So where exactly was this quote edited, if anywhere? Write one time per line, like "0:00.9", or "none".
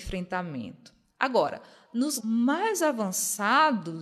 0:02.2